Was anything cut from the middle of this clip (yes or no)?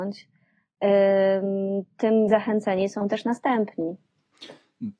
yes